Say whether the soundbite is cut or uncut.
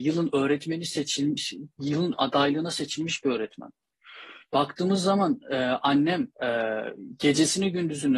cut